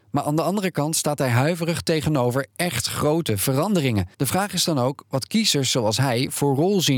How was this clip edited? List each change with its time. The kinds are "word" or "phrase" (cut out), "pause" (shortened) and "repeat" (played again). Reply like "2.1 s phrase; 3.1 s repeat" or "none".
4.1 s pause